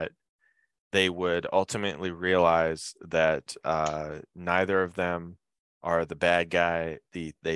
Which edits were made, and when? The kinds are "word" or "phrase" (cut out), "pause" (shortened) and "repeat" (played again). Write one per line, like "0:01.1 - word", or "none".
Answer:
none